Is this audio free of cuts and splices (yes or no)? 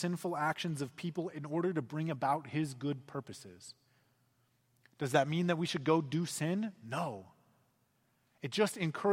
yes